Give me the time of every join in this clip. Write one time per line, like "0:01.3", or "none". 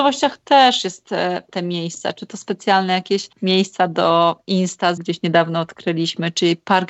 0:01.5
0:03.3
0:05.0